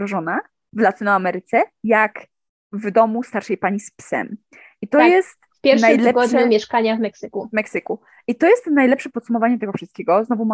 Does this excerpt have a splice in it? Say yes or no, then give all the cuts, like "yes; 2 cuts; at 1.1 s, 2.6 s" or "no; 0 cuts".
no; 0 cuts